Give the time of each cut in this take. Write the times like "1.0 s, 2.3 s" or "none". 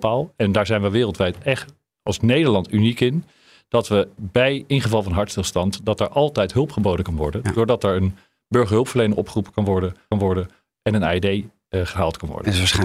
4.2 s, 10.1 s